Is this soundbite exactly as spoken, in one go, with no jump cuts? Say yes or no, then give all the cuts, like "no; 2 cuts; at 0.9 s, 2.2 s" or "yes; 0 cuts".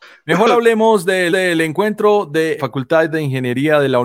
no; 2 cuts; at 1.3 s, 2.6 s